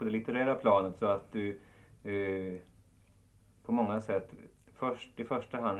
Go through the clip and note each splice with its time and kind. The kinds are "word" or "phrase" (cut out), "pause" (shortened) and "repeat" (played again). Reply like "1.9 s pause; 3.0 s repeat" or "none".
none